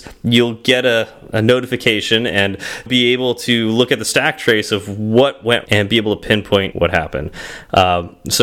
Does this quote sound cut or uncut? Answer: cut